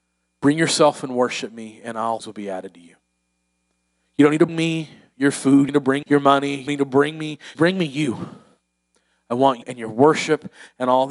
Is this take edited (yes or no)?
yes